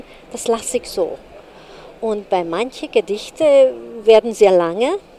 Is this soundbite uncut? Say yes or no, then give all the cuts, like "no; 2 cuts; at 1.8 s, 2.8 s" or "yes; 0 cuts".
yes; 0 cuts